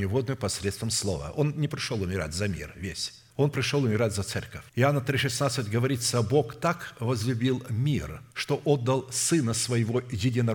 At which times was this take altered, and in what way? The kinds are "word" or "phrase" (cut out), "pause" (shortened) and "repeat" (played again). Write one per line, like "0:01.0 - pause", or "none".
0:03.3 - pause
0:04.7 - pause
0:08.3 - pause